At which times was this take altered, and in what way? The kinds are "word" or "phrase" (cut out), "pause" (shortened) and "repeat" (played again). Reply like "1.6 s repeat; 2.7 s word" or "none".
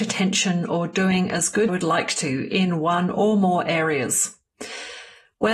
1.7 s phrase